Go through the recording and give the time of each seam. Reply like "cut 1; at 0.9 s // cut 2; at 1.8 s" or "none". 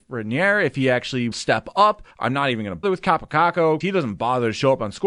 cut 1; at 1.3 s // cut 2; at 2.1 s // cut 3; at 2.8 s // cut 4; at 3.8 s